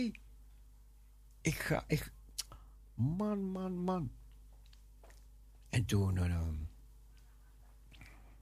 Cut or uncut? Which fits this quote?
uncut